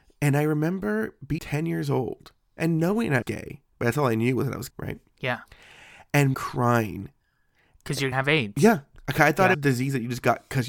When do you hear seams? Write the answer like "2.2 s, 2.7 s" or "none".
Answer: 1.4 s, 3.2 s, 4.7 s, 6.3 s, 8.1 s, 9.5 s